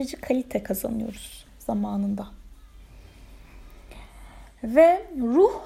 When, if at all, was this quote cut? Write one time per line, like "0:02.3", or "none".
0:01.5